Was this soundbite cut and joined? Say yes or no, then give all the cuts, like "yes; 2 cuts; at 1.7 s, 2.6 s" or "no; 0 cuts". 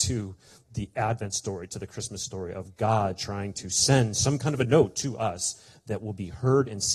no; 0 cuts